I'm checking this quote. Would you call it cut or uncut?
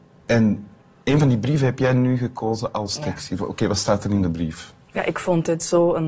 cut